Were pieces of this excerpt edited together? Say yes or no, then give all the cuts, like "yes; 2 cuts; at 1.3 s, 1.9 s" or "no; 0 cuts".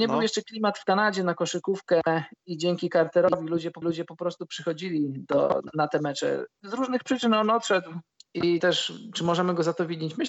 yes; 4 cuts; at 2.4 s, 3.8 s, 6.5 s, 8.1 s